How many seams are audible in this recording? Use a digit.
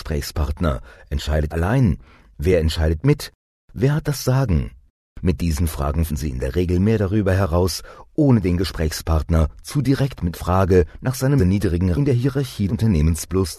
6